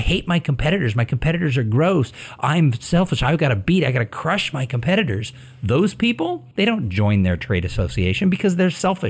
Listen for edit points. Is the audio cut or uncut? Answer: cut